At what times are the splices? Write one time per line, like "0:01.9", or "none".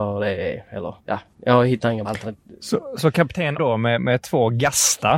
0:01.0
0:02.0
0:03.6

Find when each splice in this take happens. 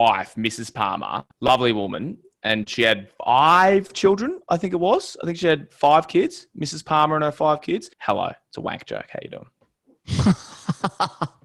0:01.3
0:03.2
0:07.9

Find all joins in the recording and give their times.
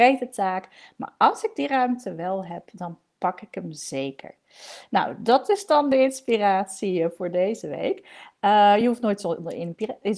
none

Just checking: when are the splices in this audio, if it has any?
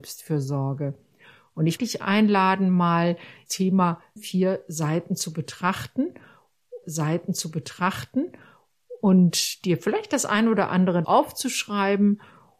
0:01.8
0:03.5
0:04.2
0:06.8
0:11.0

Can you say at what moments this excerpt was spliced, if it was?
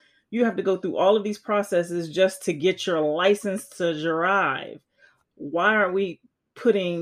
none

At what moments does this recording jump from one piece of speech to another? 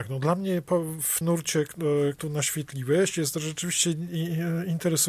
0:01.2
0:02.1

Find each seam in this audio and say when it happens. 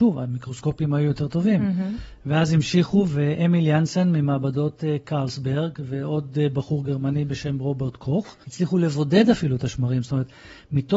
0:08.4

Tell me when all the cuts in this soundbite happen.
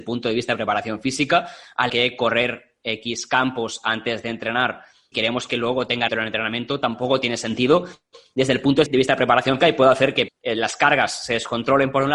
0:01.9
0:05.1
0:06.1
0:08.9
0:09.6
0:10.3

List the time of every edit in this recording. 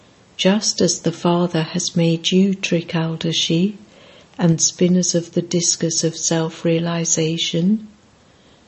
none

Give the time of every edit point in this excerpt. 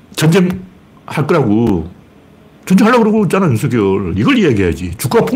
none

